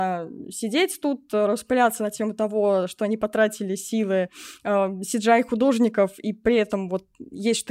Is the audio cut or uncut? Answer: uncut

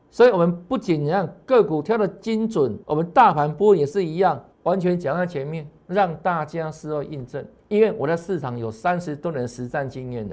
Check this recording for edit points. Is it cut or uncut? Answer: cut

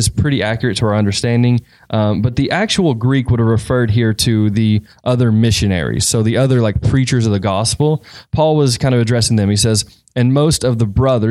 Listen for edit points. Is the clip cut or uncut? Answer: uncut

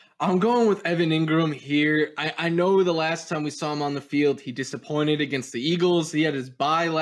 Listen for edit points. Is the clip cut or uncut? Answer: uncut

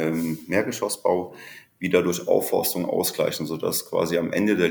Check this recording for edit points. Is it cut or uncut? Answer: uncut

